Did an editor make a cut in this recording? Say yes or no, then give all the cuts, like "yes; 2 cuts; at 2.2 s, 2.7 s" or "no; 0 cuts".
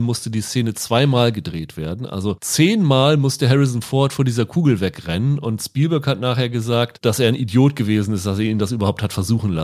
no; 0 cuts